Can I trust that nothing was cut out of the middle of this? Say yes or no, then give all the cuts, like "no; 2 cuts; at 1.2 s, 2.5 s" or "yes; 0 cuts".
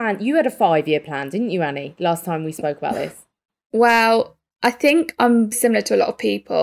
no; 1 cut; at 5.5 s